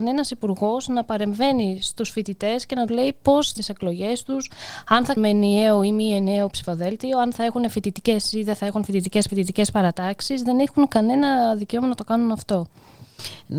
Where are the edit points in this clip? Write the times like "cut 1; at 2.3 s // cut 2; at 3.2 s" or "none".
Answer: cut 1; at 2.9 s // cut 2; at 3.6 s // cut 3; at 5.2 s // cut 4; at 9.3 s